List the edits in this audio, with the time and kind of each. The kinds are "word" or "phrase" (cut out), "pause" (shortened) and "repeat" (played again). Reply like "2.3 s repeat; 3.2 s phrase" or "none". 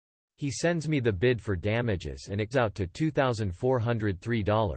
2.5 s word